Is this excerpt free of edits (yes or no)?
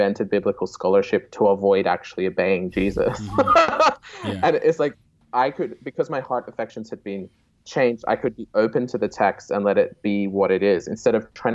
yes